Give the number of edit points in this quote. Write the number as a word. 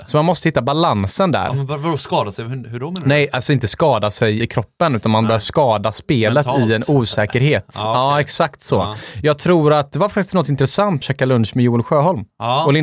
two